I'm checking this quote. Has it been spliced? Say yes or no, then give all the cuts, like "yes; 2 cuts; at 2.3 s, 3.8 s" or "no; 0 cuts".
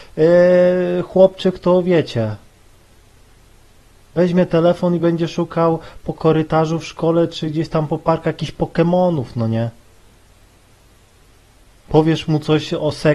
no; 0 cuts